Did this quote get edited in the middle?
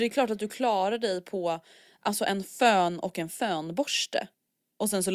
no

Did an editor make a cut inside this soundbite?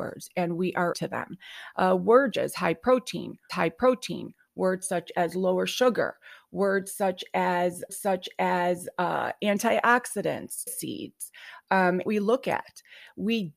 yes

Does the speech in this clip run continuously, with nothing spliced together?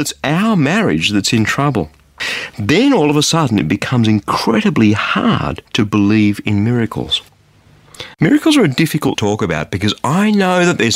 no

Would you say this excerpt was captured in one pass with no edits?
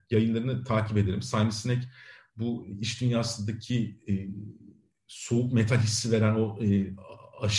yes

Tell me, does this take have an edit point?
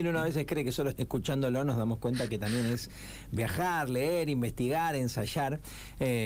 yes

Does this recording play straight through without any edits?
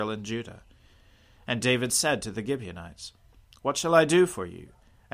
yes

